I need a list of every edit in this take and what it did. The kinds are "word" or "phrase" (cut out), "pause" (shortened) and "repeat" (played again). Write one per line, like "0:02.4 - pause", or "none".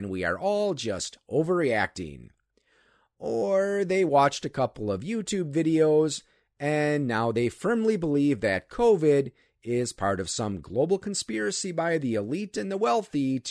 none